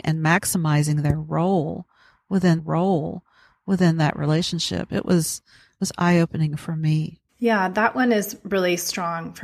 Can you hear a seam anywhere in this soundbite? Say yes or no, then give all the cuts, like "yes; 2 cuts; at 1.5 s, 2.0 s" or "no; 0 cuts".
yes; 2 cuts; at 2.6 s, 7.3 s